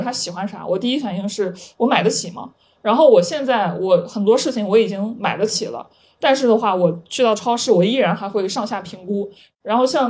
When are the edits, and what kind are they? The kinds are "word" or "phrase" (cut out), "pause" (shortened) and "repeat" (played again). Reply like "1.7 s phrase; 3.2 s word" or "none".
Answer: none

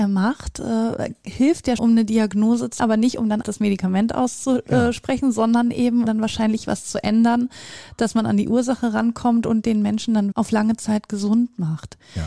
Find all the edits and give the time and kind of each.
1.8 s word; 2.8 s word; 3.4 s word; 6.1 s word; 6.7 s word; 10.3 s word

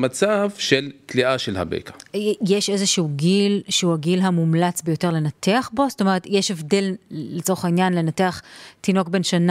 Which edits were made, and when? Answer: none

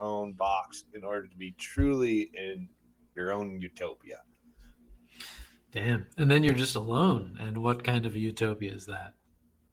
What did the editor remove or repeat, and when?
none

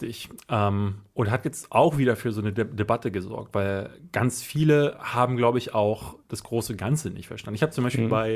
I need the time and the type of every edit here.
none

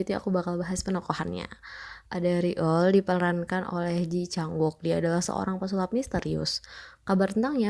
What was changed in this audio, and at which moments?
2.1 s pause

